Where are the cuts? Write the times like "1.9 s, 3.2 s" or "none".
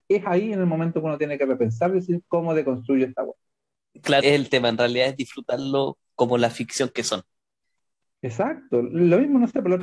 4.2 s